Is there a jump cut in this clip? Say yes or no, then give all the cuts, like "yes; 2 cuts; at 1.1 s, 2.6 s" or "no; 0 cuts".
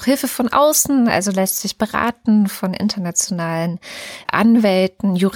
no; 0 cuts